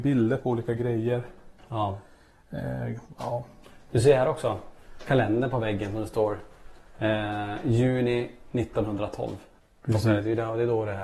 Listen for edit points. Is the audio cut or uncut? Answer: cut